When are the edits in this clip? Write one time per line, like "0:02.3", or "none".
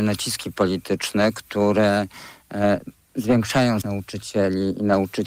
0:03.8